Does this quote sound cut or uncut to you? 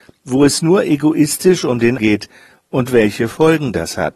cut